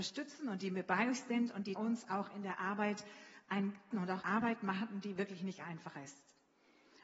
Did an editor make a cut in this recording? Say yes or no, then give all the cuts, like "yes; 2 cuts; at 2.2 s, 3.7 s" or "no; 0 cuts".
yes; 3 cuts; at 1.8 s, 3.9 s, 4.2 s